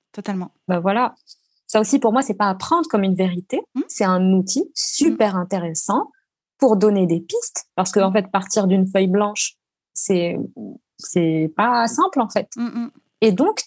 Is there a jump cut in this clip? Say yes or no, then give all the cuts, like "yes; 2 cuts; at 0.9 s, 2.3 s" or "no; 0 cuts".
no; 0 cuts